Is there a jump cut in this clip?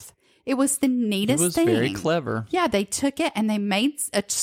no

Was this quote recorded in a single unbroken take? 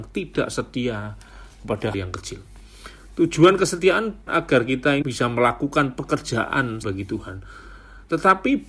no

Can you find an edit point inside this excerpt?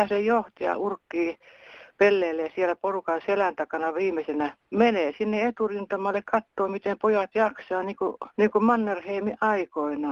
no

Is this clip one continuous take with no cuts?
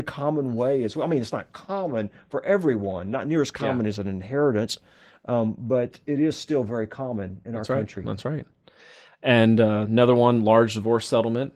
yes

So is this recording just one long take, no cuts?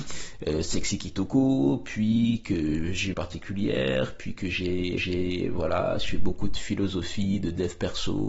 no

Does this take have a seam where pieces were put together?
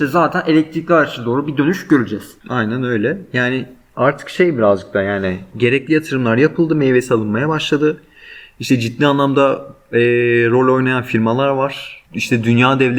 yes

